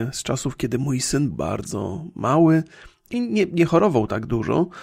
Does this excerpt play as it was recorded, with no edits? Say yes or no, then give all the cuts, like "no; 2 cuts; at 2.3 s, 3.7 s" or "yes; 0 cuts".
no; 2 cuts; at 1.3 s, 3.1 s